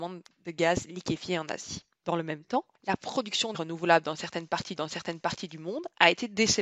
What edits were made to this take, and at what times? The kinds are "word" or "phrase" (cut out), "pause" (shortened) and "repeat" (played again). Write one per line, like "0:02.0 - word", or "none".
0:01.9 - pause
0:02.7 - pause
0:03.5 - word
0:04.8 - repeat